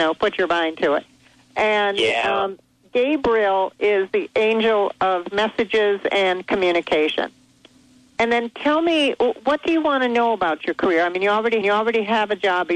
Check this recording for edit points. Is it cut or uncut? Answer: cut